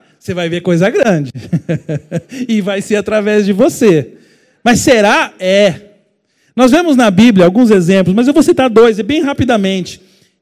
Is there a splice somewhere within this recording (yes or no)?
no